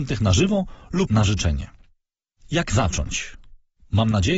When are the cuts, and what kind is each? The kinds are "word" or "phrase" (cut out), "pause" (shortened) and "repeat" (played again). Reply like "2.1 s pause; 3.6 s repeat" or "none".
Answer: 1.1 s word